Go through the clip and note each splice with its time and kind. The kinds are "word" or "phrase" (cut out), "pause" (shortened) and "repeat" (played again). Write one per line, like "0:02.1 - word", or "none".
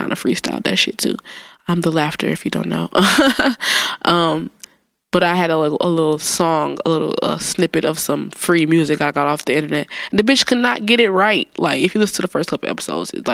none